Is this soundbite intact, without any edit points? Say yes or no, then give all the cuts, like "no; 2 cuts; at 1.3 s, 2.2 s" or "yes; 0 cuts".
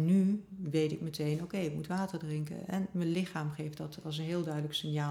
yes; 0 cuts